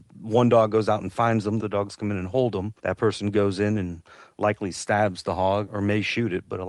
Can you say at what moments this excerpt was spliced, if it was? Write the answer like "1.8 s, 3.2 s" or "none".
1.6 s, 2.8 s, 5.7 s